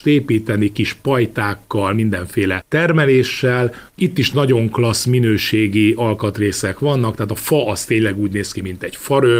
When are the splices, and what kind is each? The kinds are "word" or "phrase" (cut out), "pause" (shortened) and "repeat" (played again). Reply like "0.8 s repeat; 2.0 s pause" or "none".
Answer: 3.9 s pause